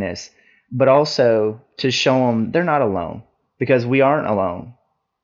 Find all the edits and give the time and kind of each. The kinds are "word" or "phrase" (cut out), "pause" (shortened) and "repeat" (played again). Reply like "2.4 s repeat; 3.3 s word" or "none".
none